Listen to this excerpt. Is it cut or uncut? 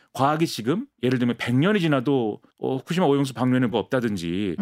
cut